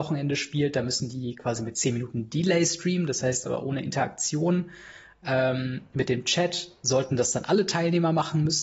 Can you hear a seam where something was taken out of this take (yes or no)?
no